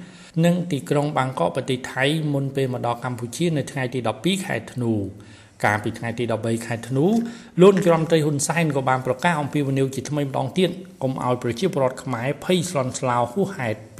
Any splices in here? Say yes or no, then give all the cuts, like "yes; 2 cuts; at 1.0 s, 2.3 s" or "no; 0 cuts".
no; 0 cuts